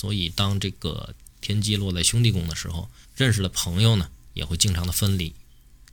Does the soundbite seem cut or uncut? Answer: cut